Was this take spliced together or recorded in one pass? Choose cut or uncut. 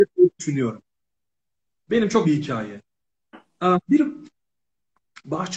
cut